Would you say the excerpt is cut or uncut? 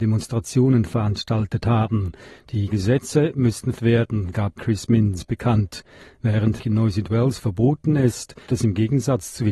cut